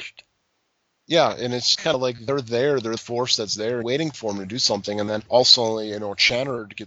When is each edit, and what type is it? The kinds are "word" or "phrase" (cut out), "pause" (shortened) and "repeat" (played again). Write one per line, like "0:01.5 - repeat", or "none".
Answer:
0:01.7 - word
0:03.0 - word
0:03.8 - phrase
0:05.3 - pause